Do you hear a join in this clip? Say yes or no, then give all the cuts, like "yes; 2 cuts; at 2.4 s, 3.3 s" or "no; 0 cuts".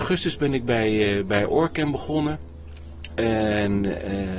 no; 0 cuts